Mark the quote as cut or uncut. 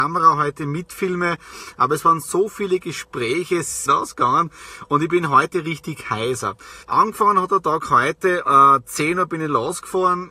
cut